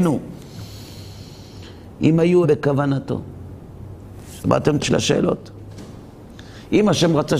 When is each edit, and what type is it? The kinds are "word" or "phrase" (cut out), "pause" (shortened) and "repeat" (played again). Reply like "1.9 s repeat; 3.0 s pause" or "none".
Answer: 2.4 s word; 4.8 s word